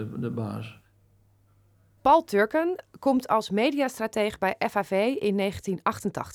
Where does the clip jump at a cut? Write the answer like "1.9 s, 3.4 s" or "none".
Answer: none